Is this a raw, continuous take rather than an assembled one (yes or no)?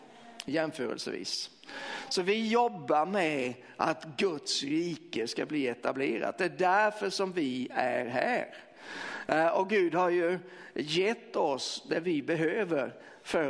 yes